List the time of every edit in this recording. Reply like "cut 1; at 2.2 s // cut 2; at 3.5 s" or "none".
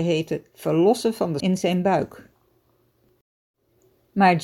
cut 1; at 1.4 s